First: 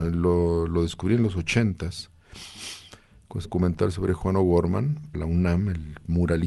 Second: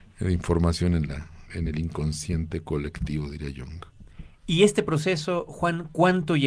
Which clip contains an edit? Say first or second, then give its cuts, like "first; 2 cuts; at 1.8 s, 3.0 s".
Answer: first; 2 cuts; at 3.4 s, 5.1 s